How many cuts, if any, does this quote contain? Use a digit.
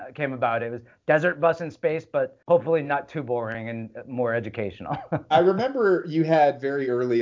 1